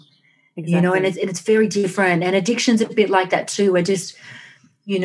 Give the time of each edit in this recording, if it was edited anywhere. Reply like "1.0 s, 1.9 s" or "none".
none